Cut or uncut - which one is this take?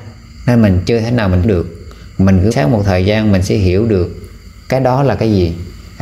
cut